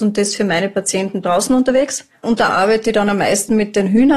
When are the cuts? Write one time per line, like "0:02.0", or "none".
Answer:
0:01.2
0:02.5